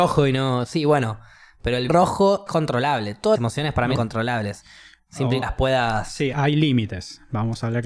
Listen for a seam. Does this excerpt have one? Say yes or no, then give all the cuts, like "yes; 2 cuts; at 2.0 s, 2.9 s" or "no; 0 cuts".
yes; 6 cuts; at 1.9 s, 2.5 s, 3.4 s, 4.0 s, 5.4 s, 6.3 s